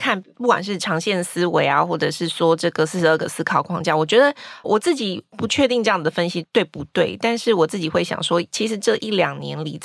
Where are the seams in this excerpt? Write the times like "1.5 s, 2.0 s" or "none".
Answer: 4.6 s